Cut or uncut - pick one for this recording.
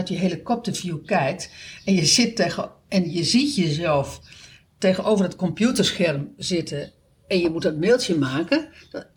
uncut